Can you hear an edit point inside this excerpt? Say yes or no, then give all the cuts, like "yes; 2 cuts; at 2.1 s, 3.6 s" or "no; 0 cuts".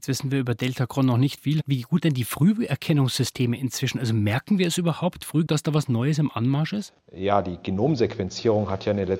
yes; 3 cuts; at 1.4 s, 2.0 s, 5.5 s